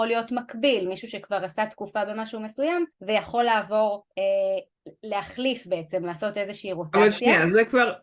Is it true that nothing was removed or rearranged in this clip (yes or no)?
no